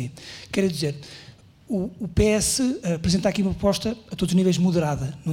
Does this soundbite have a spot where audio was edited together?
no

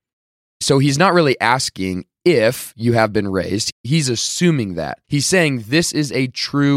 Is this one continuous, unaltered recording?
no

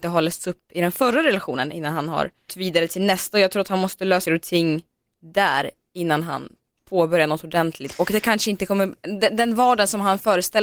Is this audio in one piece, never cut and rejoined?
no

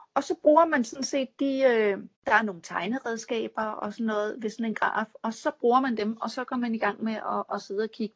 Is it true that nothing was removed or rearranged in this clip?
no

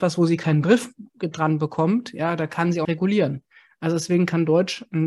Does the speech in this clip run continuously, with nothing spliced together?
no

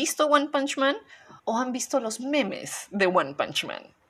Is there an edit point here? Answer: yes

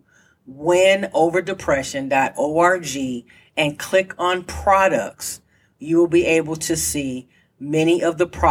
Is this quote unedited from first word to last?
yes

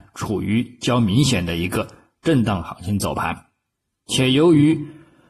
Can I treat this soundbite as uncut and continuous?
yes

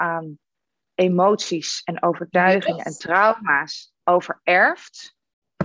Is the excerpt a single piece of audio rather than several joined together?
no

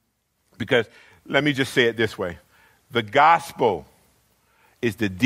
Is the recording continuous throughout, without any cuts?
yes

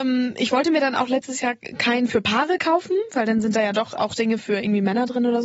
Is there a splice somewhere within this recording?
no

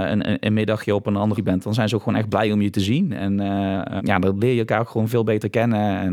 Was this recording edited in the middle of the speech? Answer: yes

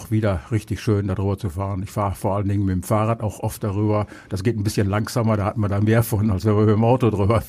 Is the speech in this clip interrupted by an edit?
no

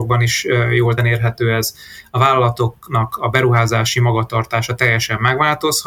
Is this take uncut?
no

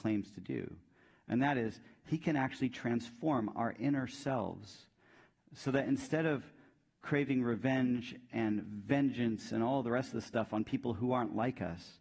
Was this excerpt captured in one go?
yes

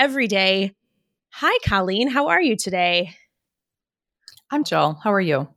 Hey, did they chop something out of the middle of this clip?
yes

